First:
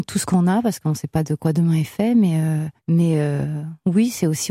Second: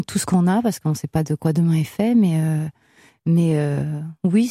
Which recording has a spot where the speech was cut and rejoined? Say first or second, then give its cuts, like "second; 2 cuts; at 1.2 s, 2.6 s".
first; 1 cut; at 2.8 s